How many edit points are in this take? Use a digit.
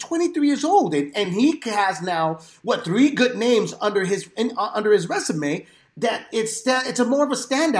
0